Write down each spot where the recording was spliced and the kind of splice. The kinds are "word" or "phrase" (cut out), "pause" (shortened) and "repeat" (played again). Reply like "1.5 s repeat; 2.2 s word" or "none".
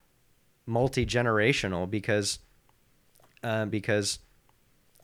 3.7 s repeat